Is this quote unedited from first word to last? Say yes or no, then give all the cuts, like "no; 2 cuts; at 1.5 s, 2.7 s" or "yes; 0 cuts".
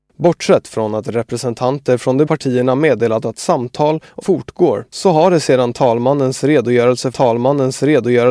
no; 3 cuts; at 2.3 s, 4.2 s, 7.1 s